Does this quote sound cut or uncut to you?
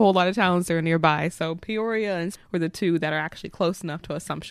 cut